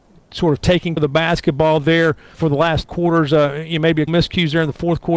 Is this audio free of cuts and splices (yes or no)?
no